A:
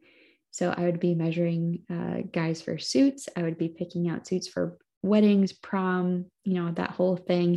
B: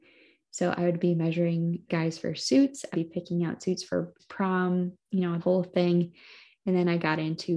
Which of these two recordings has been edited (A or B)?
B